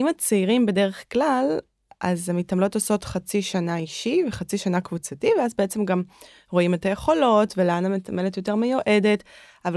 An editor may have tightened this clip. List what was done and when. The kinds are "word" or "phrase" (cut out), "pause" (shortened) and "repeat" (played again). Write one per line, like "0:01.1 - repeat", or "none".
none